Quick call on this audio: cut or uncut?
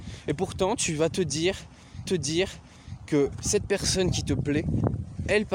cut